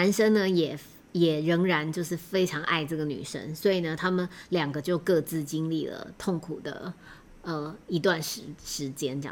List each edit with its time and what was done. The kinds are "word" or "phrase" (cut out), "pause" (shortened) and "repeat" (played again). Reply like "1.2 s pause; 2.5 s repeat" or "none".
none